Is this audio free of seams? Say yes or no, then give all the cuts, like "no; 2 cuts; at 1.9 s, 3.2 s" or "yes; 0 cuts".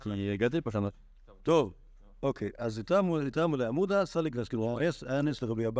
no; 1 cut; at 1.4 s